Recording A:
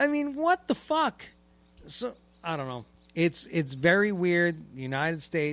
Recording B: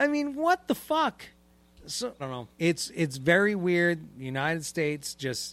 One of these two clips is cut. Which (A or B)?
B